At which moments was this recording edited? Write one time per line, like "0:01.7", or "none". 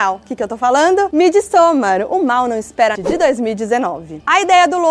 0:03.0